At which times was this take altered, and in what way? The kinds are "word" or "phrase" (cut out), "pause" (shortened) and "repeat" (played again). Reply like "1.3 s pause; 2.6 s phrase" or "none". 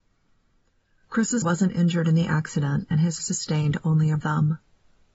1.4 s word; 3.2 s word; 4.2 s word